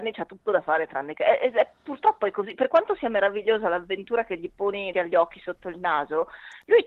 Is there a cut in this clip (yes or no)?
yes